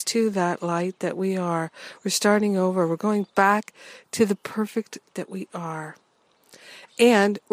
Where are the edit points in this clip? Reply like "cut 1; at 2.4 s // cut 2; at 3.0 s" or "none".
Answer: cut 1; at 5.1 s